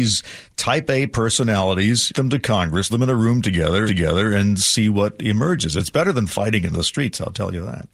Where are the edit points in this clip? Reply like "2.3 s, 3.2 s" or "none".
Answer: 2.1 s, 2.9 s, 3.9 s